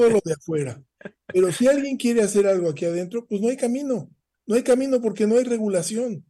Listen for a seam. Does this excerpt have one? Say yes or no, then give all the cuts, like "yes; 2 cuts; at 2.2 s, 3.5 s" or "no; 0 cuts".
no; 0 cuts